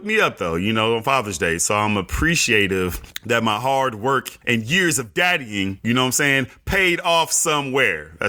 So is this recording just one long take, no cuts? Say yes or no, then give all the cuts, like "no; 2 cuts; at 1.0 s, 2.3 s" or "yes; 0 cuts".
yes; 0 cuts